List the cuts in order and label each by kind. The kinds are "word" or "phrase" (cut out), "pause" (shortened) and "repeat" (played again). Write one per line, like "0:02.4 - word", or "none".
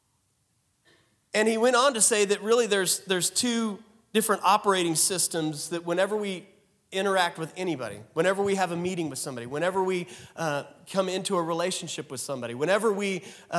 none